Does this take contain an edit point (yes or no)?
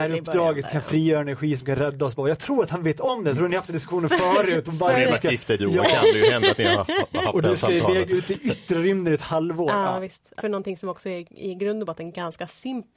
yes